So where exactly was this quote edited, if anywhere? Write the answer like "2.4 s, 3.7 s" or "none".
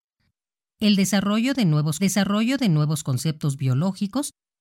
2.0 s